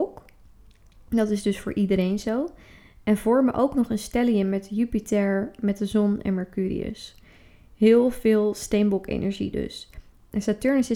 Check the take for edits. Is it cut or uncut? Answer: uncut